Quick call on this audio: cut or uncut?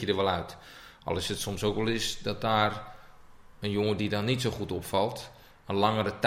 uncut